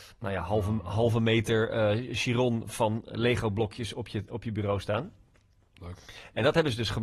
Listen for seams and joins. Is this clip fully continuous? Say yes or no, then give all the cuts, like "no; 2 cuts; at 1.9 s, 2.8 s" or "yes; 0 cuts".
yes; 0 cuts